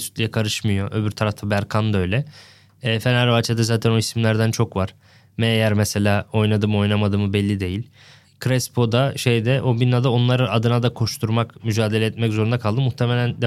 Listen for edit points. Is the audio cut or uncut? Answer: uncut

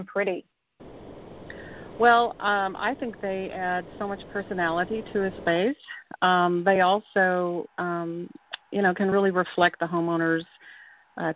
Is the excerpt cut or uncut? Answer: uncut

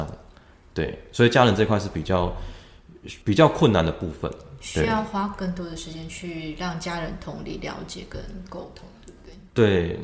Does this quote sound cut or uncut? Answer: cut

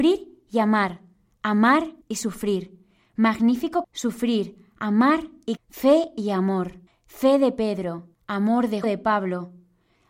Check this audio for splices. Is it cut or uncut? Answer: cut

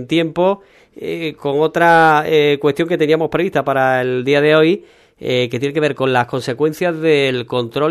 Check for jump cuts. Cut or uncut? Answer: uncut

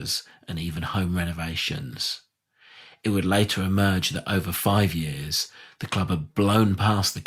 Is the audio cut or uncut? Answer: uncut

